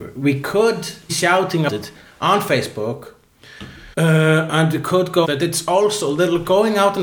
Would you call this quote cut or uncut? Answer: cut